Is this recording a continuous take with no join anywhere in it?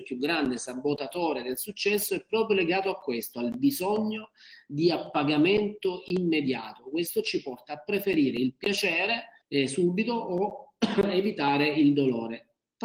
no; 1 cut; at 9.4 s

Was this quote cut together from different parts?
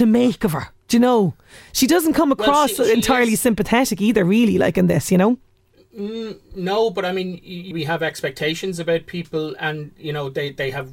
yes; 1 cut; at 7.7 s

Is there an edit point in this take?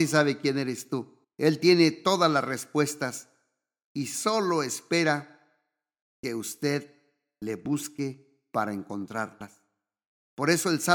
yes; 1 cut; at 1.2 s

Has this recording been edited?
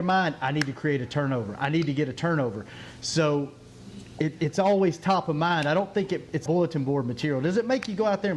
yes; 1 cut; at 6.5 s

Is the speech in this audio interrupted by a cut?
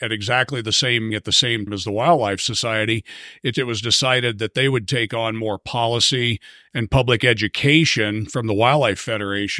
yes; 3 cuts; at 1.1 s, 1.7 s, 3.5 s

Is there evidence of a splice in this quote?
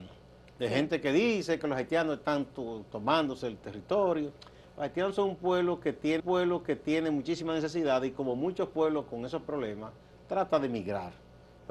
yes; 1 cut; at 6.2 s

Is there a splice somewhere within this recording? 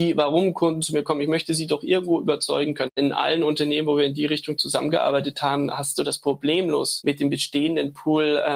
no; 0 cuts

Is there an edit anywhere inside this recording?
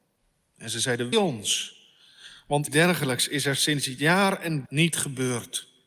yes; 3 cuts; at 1.1 s, 2.7 s, 4.7 s

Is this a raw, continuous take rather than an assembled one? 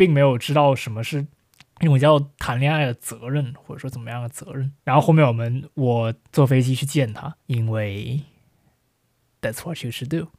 no; 4 cuts; at 1.4 s, 4.8 s, 6.2 s, 7.4 s

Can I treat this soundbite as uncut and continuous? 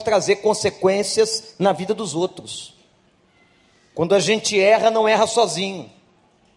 yes; 0 cuts

